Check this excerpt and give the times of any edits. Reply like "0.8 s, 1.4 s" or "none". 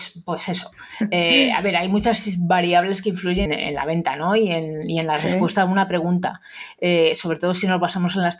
3.5 s